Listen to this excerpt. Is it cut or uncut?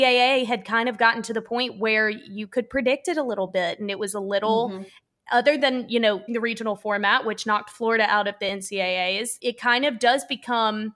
cut